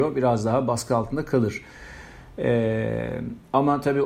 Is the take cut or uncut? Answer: uncut